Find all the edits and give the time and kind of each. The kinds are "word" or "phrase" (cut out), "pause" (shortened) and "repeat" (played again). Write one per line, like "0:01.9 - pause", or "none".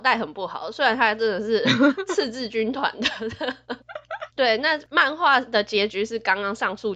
0:04.3 - pause